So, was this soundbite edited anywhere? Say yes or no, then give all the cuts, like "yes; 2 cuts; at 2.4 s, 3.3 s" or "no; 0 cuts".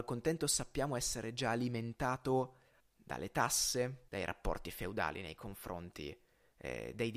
yes; 2 cuts; at 2.8 s, 4.1 s